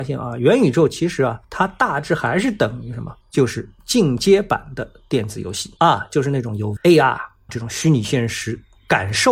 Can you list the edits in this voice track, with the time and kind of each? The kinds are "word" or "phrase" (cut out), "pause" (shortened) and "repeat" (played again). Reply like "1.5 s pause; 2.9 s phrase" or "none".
1.4 s pause; 3.2 s pause; 5.8 s pause; 6.8 s word; 7.5 s word

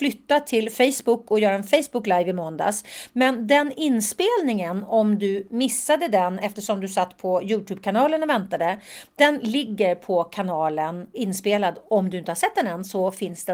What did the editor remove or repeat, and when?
11.1 s word

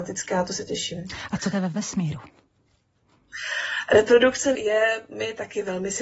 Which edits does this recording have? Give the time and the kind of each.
1.5 s phrase; 4.5 s phrase

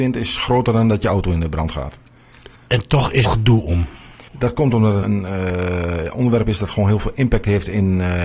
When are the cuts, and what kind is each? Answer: 2.6 s pause; 3.2 s phrase; 4.3 s pause; 5.0 s word

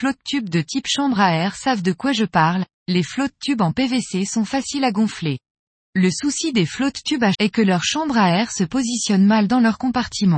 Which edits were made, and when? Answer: 2.7 s pause; 5.7 s pause; 7.3 s word

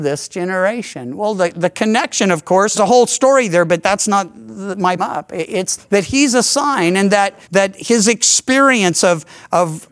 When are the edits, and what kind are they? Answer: 2.7 s phrase; 5.0 s phrase; 5.8 s word; 7.4 s pause

